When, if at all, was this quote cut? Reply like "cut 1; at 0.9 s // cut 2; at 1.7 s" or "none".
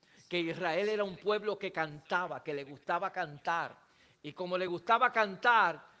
none